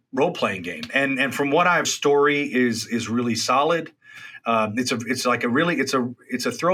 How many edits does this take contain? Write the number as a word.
one